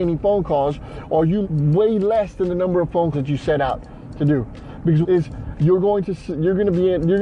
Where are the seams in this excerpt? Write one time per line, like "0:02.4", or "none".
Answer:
0:01.4
0:03.1
0:05.0